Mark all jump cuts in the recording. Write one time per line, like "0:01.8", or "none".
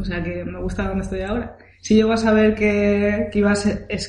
none